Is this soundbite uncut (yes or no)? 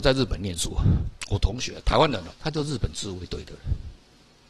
no